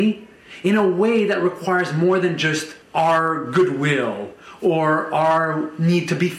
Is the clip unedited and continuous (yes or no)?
no